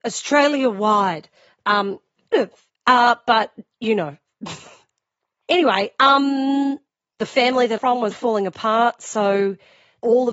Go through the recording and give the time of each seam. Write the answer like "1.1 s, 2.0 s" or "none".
2.3 s, 7.8 s, 8.1 s